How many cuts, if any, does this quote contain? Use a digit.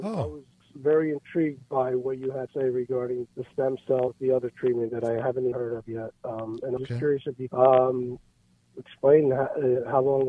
6